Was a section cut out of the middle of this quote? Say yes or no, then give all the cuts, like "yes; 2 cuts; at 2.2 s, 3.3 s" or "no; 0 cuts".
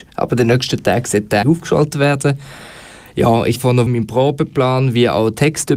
yes; 3 cuts; at 1.4 s, 3.6 s, 3.9 s